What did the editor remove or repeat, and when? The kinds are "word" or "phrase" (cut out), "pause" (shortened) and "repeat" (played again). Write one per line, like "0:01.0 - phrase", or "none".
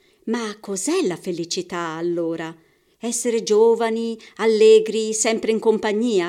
none

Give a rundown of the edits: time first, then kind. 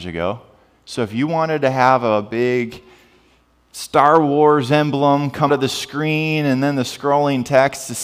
0:05.5 - word

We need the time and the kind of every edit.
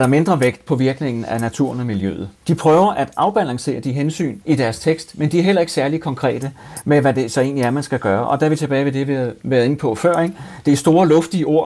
0:02.3 - pause
0:04.4 - pause

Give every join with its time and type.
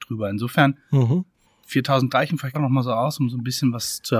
0:02.1 - word
0:02.5 - word

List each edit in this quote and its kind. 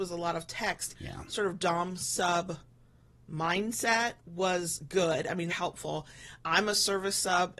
0:00.9 - word
0:04.2 - pause
0:05.5 - phrase
0:06.4 - word

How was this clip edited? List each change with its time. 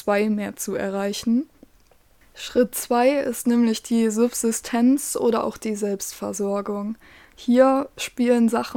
none

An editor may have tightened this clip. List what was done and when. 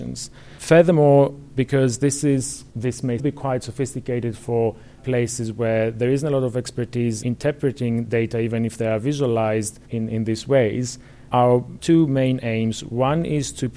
0:02.7 - pause
0:03.2 - word
0:05.0 - word
0:07.2 - word
0:09.8 - pause

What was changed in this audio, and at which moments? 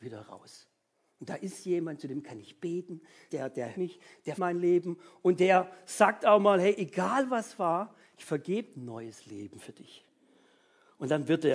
0:03.3 - word
0:03.7 - word
0:04.4 - word
0:08.7 - phrase

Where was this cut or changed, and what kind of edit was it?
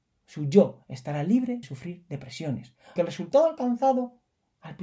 0:01.6 - word
0:03.0 - word

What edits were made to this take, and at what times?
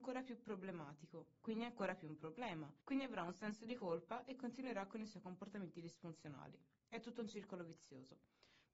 0:02.8 - pause

